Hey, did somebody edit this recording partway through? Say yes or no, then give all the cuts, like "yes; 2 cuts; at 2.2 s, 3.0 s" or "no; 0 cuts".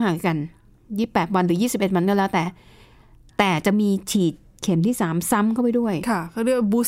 no; 0 cuts